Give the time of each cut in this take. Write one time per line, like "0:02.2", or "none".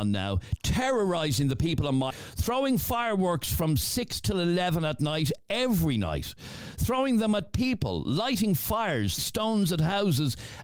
0:02.1
0:09.2